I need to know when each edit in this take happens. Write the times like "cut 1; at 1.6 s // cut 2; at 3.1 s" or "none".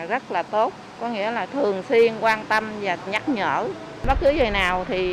cut 1; at 3.1 s